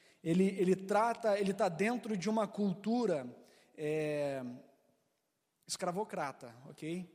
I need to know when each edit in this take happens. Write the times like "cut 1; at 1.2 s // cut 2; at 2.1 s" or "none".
none